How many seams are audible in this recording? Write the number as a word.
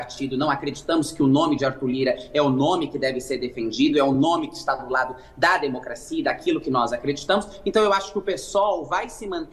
zero